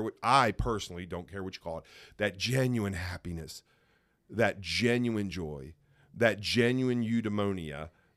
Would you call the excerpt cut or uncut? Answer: uncut